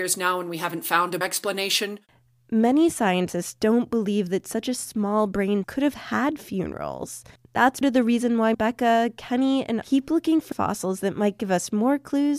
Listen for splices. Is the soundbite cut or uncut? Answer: cut